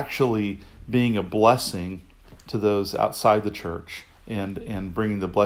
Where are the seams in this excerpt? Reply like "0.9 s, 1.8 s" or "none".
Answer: 4.1 s